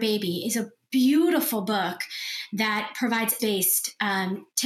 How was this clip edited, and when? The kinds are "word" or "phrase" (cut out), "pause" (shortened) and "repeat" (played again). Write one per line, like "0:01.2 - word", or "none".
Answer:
0:03.4 - word